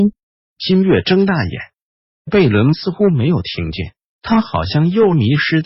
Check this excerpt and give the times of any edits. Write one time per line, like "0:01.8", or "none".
none